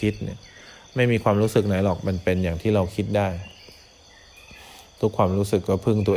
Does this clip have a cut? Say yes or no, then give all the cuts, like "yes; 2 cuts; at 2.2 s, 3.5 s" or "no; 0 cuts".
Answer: no; 0 cuts